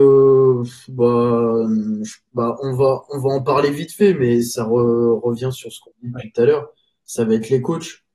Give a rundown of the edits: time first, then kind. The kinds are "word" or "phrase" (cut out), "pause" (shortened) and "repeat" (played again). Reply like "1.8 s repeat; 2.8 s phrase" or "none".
none